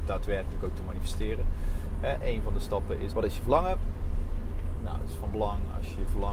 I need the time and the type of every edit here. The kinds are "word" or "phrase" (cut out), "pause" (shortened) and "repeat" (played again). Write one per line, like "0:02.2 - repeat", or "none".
0:03.1 - word